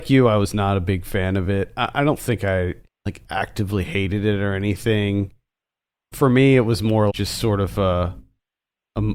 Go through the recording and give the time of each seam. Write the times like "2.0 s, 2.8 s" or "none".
2.9 s, 6.1 s, 7.1 s